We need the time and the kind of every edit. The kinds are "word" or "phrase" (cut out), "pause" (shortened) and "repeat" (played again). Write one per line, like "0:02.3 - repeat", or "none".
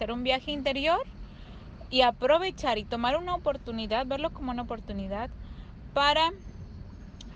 0:01.9 - word